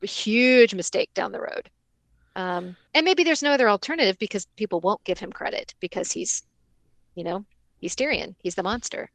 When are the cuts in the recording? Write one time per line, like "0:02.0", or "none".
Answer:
0:02.9